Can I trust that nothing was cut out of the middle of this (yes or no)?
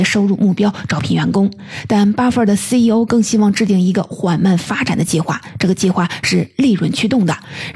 yes